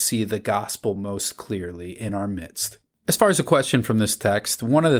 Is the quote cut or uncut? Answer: uncut